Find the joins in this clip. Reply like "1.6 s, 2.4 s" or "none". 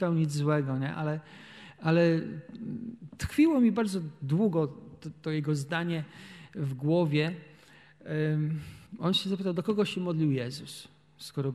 8.9 s